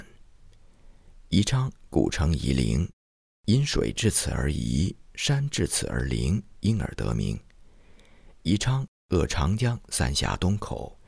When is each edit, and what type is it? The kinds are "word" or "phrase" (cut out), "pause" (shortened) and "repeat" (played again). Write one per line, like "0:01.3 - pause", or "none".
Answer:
none